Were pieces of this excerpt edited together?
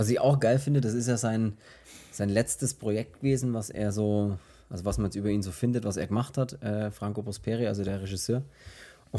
no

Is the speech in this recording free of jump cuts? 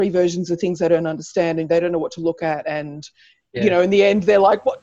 yes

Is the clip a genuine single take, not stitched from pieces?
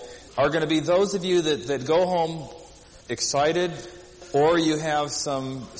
no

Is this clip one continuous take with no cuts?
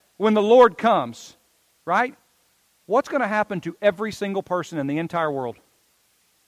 yes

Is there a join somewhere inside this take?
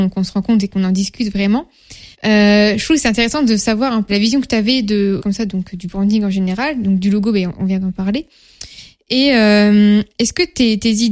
yes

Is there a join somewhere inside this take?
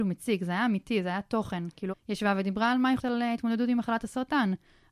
yes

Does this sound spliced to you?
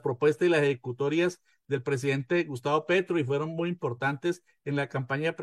no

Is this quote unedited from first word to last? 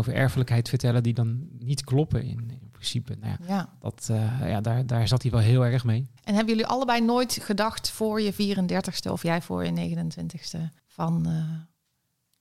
no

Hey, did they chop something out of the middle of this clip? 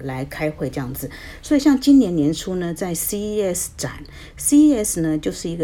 no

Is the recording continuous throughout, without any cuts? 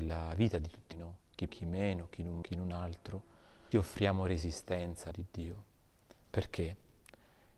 no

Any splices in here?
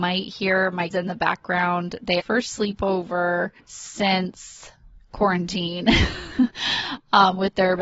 yes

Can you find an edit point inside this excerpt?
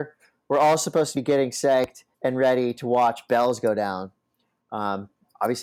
yes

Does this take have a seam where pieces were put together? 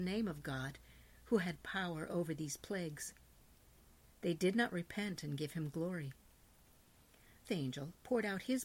yes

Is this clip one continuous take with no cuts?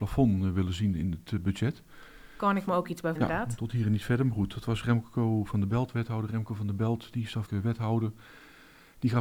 no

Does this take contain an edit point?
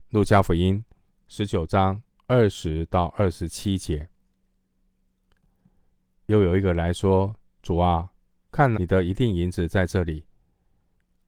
yes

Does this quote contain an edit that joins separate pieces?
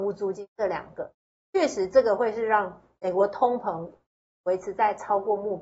no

